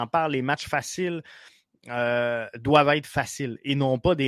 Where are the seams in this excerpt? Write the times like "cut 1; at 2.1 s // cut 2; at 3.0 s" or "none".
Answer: none